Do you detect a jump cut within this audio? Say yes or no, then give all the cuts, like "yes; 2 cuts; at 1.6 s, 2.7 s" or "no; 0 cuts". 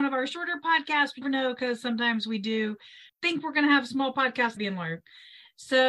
yes; 3 cuts; at 1.2 s, 3.1 s, 4.6 s